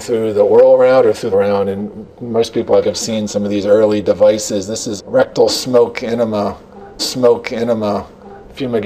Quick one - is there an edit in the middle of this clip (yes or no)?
yes